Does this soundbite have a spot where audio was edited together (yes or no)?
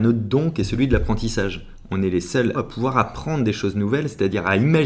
yes